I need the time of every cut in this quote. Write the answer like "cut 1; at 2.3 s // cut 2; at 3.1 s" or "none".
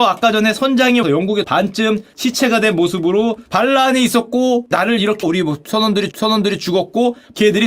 cut 1; at 1.0 s // cut 2; at 1.4 s // cut 3; at 3.5 s // cut 4; at 4.7 s // cut 5; at 5.2 s // cut 6; at 6.1 s